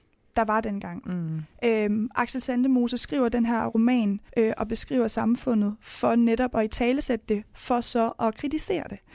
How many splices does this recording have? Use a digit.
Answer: 1